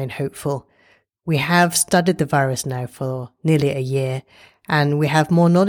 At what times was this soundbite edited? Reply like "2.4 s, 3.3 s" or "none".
none